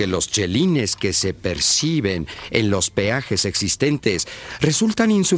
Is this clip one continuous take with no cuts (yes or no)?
yes